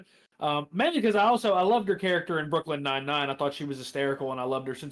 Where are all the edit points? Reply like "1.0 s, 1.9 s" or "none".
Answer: none